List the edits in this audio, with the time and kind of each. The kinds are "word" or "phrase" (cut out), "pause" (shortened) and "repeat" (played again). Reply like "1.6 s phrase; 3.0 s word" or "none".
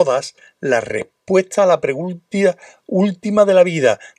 none